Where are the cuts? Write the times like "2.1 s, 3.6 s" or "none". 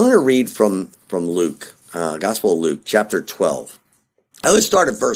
1.8 s